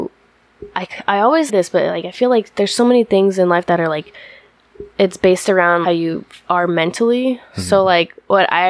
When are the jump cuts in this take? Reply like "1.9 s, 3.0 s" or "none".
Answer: 1.5 s, 5.8 s